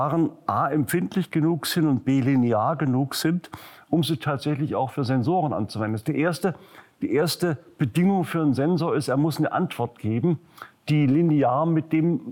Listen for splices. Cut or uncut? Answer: uncut